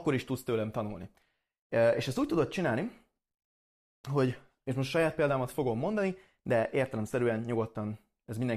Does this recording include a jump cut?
no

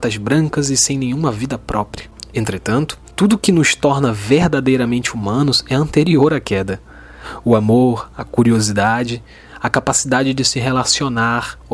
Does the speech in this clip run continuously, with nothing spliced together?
yes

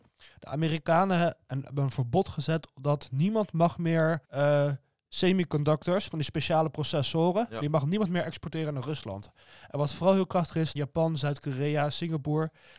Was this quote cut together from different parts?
yes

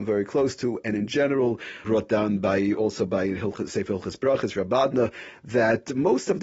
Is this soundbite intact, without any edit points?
no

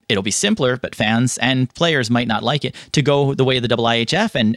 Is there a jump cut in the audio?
no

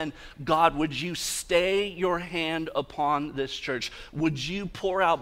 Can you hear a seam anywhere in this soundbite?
no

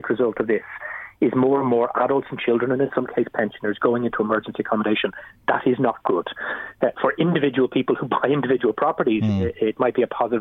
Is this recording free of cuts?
yes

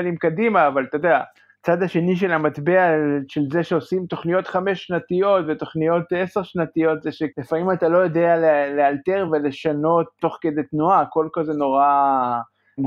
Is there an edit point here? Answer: no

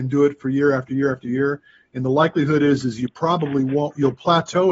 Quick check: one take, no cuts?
yes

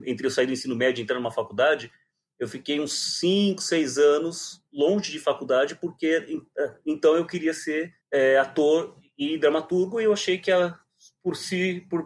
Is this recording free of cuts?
no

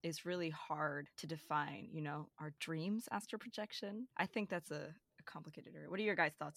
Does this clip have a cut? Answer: no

